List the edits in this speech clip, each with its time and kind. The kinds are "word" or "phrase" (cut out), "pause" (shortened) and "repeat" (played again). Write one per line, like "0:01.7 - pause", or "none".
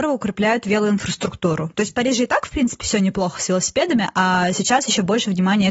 none